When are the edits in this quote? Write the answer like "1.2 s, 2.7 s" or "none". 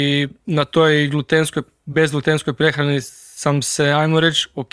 none